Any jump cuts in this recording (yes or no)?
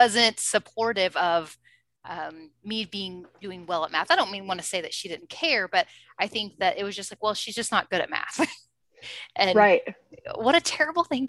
no